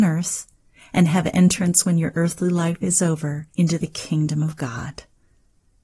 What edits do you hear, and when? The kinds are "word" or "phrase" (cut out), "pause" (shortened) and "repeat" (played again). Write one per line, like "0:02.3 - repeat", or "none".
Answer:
0:03.5 - pause